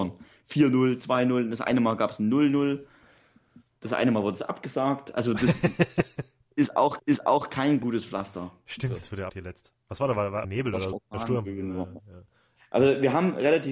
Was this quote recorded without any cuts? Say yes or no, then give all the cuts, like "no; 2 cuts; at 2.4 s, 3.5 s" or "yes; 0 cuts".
no; 4 cuts; at 7.0 s, 9.3 s, 10.4 s, 10.9 s